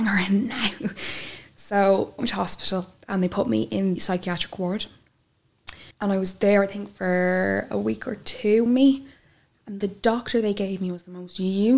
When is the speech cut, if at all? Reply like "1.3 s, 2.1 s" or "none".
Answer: 2.2 s, 4.0 s, 5.9 s, 8.7 s